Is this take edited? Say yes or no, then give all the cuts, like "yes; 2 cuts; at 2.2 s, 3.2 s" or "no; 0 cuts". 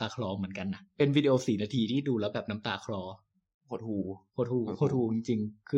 no; 0 cuts